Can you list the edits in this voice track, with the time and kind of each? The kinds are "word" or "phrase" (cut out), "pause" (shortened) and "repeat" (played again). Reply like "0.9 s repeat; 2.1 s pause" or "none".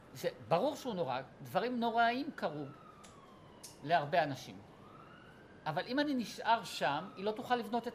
none